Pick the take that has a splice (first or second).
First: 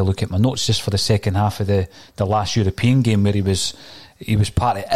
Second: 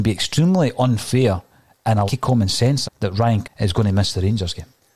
second